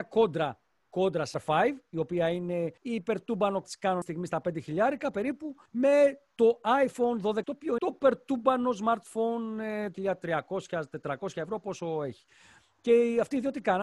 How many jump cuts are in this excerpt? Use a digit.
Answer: 8